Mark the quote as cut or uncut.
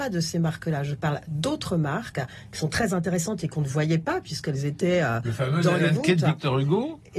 uncut